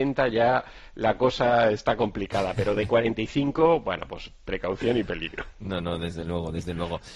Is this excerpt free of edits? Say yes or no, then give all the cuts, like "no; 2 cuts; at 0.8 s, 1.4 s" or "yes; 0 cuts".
yes; 0 cuts